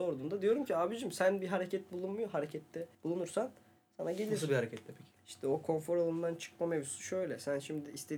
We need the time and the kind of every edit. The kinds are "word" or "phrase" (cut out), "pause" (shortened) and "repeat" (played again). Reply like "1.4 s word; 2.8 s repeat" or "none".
2.9 s pause; 5.2 s pause